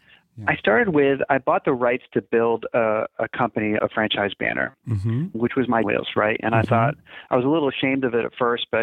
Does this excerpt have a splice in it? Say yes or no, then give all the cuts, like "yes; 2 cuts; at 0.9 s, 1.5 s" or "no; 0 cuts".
yes; 2 cuts; at 3.8 s, 5.8 s